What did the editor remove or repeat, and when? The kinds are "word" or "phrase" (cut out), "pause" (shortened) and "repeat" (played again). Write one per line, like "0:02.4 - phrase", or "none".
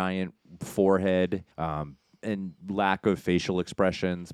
0:01.5 - pause

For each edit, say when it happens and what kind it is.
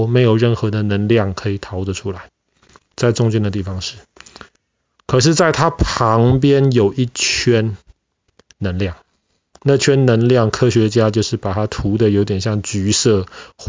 none

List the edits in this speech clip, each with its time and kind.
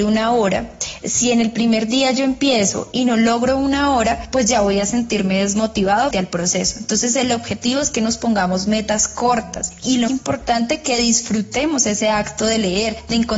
0:06.1 - word
0:10.1 - word

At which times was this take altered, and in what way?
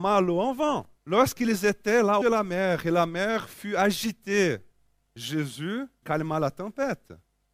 0:01.0 - pause
0:02.2 - phrase
0:06.0 - word

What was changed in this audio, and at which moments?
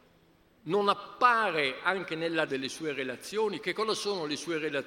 0:02.5 - word

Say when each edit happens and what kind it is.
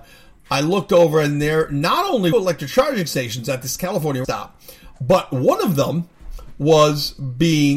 0:02.3 - phrase
0:04.2 - word

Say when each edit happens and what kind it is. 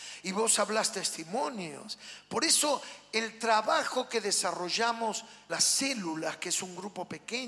0:05.5 - word

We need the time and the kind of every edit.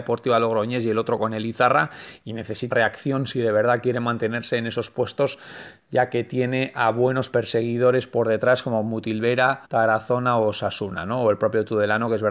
0:02.7 - word
0:09.6 - pause

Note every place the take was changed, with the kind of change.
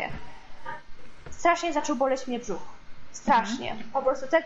none

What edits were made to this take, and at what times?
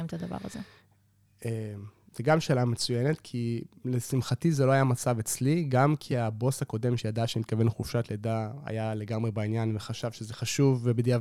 none

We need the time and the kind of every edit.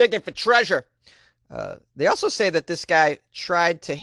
none

